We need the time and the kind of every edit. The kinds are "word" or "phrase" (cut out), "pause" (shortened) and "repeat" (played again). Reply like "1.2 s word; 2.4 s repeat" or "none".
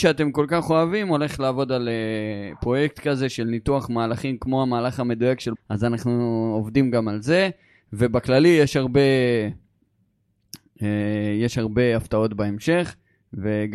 5.5 s word